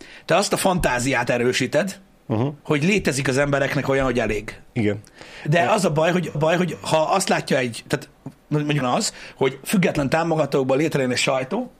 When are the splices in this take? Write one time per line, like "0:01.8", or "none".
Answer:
0:02.6
0:04.7
0:06.3
0:08.8